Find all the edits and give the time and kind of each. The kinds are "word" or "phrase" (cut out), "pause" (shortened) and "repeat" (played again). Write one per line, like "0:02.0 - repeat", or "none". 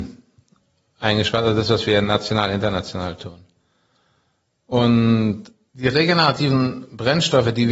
0:05.7 - word

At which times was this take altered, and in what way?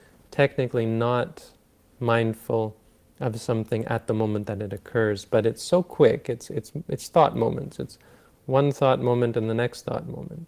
none

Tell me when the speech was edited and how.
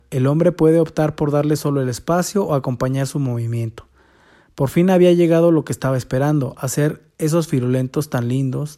none

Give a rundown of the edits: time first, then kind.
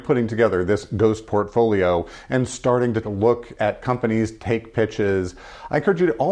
0:03.0 - word

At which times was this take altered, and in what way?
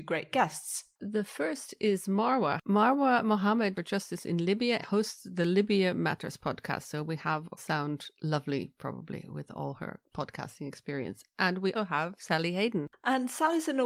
0:00.9 - pause
0:03.7 - phrase
0:04.8 - word
0:07.6 - phrase
0:11.7 - word

